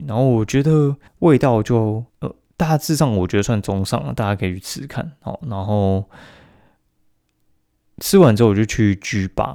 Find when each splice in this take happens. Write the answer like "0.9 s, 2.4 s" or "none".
1.1 s, 2.1 s